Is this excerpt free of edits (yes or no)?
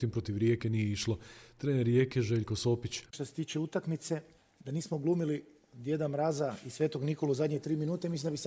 yes